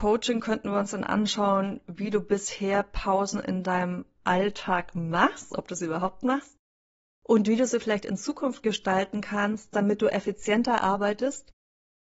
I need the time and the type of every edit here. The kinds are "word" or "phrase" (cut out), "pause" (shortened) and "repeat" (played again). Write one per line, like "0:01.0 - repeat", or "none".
none